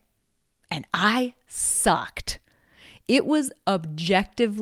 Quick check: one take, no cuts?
yes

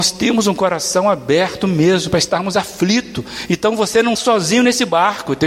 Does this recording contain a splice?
yes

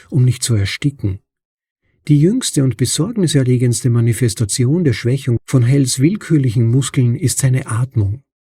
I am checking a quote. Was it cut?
no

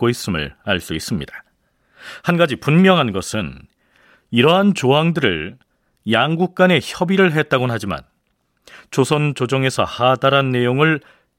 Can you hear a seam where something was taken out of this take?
no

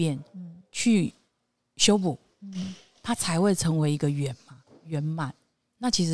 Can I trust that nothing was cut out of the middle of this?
yes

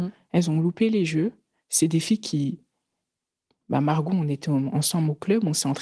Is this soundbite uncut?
yes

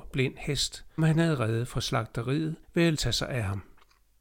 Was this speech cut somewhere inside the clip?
yes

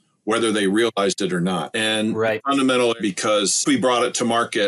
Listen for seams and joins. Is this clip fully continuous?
no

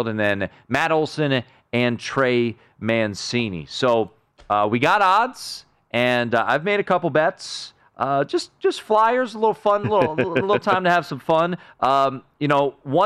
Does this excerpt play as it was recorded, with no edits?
yes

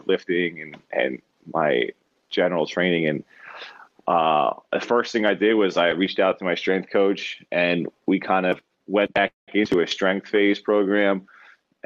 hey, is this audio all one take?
yes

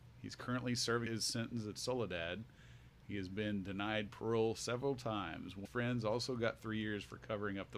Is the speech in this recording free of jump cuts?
no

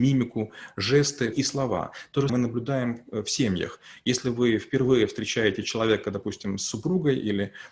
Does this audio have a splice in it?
yes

